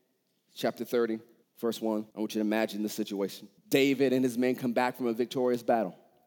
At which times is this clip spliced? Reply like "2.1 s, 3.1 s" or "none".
1.4 s, 2.1 s, 3.6 s